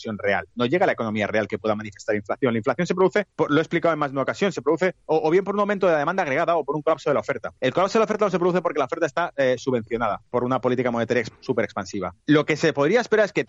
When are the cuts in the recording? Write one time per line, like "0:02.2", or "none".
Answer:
0:03.3
0:05.0
0:07.6
0:12.2